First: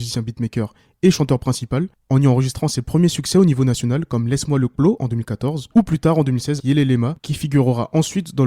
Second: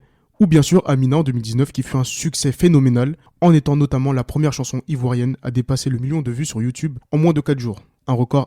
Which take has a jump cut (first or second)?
first